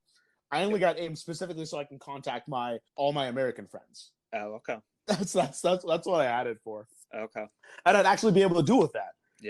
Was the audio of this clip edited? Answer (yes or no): yes